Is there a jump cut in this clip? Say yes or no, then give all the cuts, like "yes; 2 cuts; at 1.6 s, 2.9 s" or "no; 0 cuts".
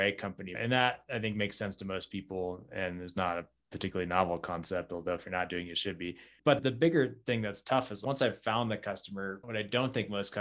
no; 0 cuts